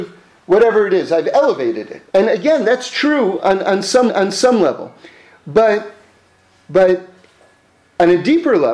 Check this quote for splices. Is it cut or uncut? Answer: cut